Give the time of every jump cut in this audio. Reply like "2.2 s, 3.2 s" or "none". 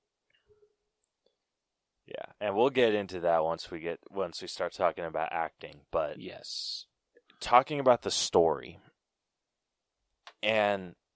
none